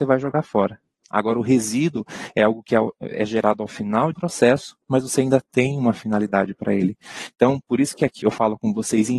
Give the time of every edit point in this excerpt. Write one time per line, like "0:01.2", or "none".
0:04.1
0:08.2